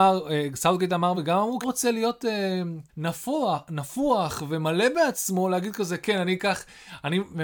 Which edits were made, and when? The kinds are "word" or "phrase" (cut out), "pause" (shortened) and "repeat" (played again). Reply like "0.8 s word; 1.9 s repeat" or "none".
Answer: 1.1 s word; 1.6 s phrase; 2.9 s pause